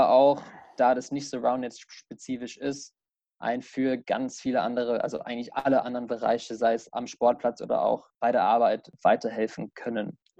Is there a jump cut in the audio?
no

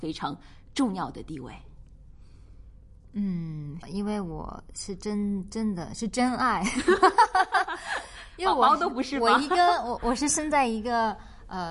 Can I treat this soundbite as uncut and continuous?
no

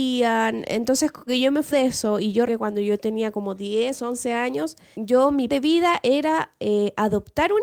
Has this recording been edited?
yes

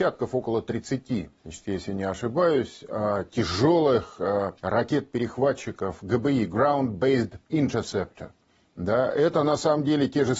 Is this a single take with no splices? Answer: no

